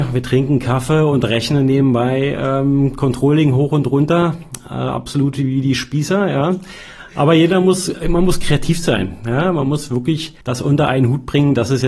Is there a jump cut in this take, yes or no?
yes